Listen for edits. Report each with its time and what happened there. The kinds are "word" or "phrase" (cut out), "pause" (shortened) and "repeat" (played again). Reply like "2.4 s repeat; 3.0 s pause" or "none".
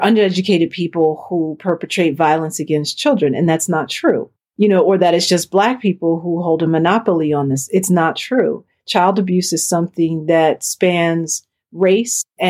none

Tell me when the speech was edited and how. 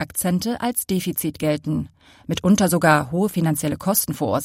none

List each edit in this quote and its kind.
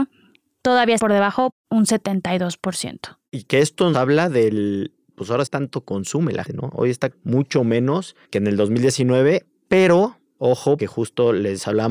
1.0 s word; 3.9 s word; 5.5 s phrase; 6.4 s word; 7.1 s word; 8.2 s pause; 10.8 s word

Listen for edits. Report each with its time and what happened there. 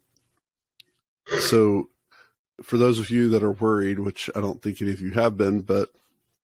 none

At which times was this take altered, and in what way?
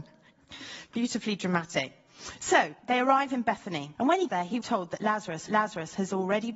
4.0 s pause; 4.3 s word; 4.6 s word; 5.5 s repeat

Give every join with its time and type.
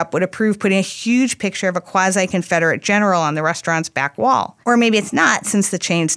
4.6 s pause

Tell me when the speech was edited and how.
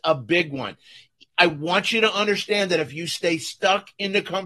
none

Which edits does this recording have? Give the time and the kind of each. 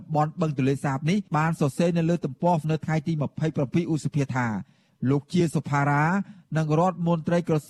1.3 s pause; 2.6 s word

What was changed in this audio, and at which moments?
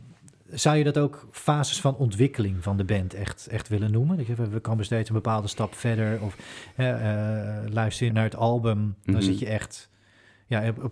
8.1 s word

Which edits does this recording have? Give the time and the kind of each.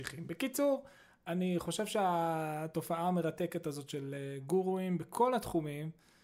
none

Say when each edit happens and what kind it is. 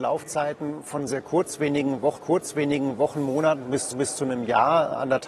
1.1 s word; 2.2 s repeat; 3.9 s repeat

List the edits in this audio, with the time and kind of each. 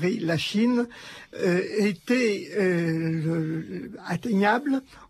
none

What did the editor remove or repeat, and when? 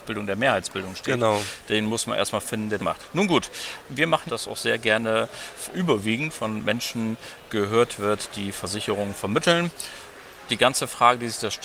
2.8 s word; 3.9 s word; 4.3 s phrase; 5.7 s word

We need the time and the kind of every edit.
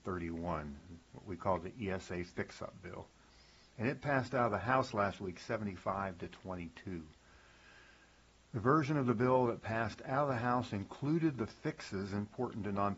none

